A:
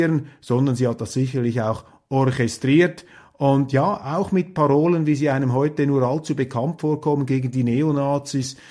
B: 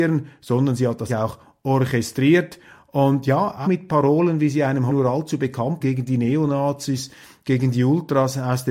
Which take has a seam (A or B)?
B